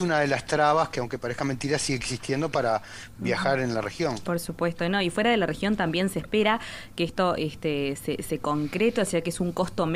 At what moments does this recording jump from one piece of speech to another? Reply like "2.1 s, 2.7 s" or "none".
none